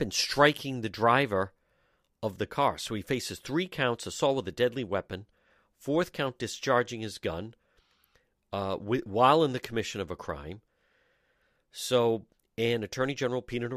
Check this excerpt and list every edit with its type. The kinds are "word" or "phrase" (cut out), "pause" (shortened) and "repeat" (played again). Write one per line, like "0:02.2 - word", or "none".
none